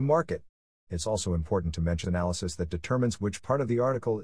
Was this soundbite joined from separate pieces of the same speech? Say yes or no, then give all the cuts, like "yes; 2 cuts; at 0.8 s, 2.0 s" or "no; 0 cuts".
yes; 1 cut; at 2.0 s